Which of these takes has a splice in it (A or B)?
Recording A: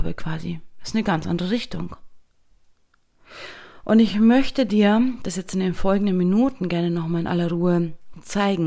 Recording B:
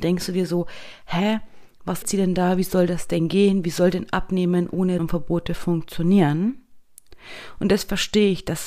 B